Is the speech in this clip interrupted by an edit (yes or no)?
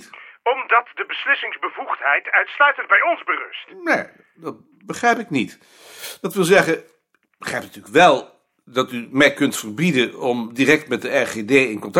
no